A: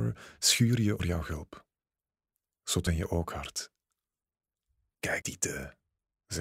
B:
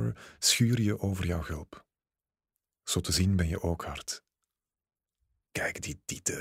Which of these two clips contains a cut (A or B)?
A